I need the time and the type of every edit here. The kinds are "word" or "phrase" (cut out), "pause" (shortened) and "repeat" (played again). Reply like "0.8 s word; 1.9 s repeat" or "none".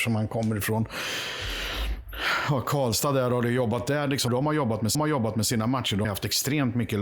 4.3 s word; 4.9 s repeat; 6.0 s word